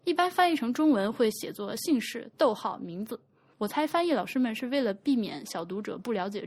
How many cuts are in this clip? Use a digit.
0